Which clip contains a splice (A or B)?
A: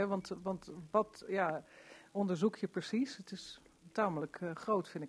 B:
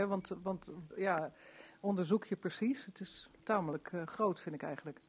B